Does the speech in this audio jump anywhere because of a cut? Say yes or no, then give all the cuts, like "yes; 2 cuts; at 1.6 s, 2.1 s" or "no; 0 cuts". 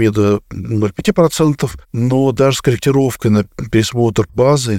yes; 1 cut; at 1.8 s